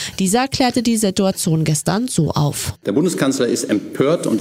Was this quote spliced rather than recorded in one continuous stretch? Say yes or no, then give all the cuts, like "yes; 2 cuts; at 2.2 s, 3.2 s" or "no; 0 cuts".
no; 0 cuts